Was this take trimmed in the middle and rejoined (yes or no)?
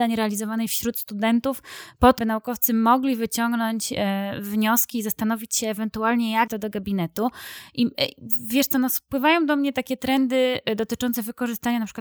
yes